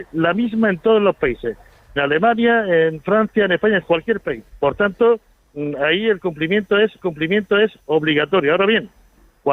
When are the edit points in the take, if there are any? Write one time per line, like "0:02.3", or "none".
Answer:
0:02.0
0:03.8
0:04.5
0:07.0